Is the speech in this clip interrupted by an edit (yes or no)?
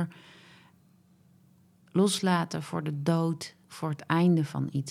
yes